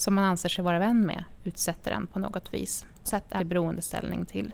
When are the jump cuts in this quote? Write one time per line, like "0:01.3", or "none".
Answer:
0:03.1
0:03.4